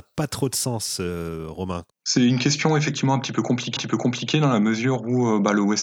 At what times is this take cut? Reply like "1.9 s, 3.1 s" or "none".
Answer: 3.8 s